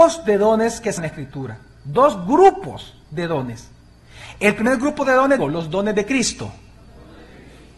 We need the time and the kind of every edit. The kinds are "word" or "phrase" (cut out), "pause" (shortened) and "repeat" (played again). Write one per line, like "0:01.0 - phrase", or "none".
0:01.0 - word
0:03.0 - pause